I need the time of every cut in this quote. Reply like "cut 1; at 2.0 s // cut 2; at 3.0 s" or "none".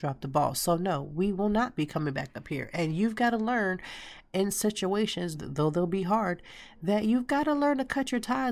cut 1; at 5.3 s